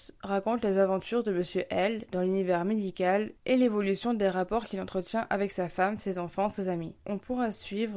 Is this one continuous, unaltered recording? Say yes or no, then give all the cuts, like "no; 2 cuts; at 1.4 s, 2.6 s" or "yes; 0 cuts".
no; 2 cuts; at 3.4 s, 7.0 s